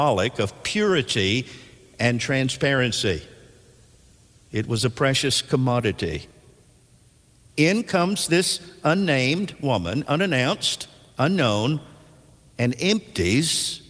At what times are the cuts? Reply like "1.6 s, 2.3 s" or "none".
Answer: none